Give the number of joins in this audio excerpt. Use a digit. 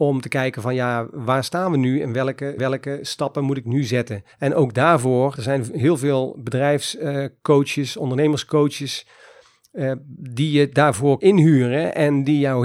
4